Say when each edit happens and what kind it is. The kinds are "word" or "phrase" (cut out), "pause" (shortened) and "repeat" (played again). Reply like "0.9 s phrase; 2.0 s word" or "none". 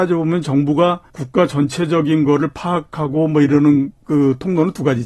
1.1 s pause

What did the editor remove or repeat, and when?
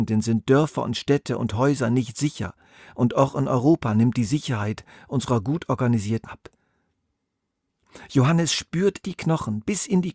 6.2 s word; 9.0 s word

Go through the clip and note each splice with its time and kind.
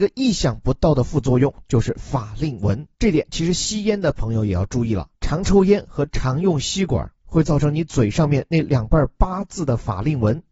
2.9 s pause; 5.1 s pause

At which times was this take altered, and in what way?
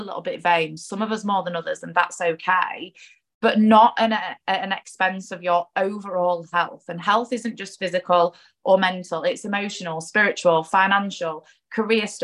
none

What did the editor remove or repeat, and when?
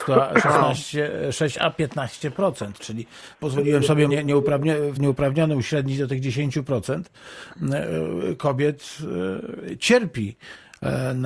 3.4 s word; 4.1 s word; 5.0 s phrase

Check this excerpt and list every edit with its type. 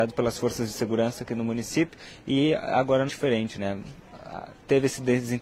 3.1 s word

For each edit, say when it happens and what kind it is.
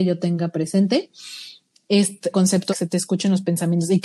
2.3 s word; 2.7 s word

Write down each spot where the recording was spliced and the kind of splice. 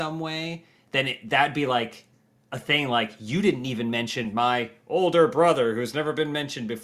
none

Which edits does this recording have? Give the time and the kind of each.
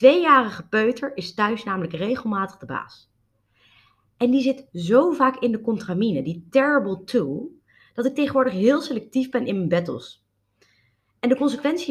none

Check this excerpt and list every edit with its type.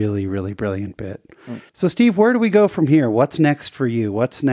1.7 s pause

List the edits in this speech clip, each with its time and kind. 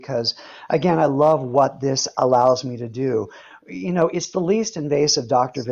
none

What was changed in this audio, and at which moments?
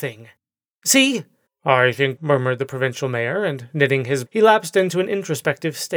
1.5 s pause; 2.2 s word; 4.3 s word

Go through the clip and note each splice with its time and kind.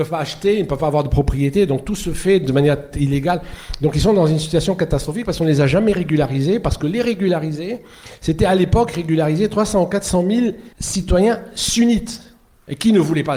10.7 s pause

